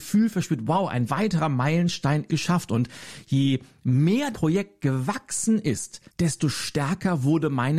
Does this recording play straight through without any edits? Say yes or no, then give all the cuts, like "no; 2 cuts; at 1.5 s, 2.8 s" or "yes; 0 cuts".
no; 3 cuts; at 2.3 s, 4.3 s, 6.1 s